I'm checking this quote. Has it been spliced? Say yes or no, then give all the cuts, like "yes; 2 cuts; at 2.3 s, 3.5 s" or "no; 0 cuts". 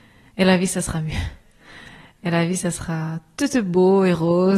no; 0 cuts